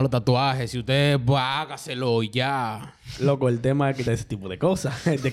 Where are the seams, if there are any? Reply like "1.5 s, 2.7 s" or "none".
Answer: 4.1 s